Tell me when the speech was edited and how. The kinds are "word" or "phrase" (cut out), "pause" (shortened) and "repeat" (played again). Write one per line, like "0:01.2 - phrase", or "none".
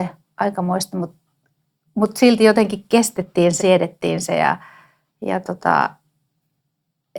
0:03.6 - word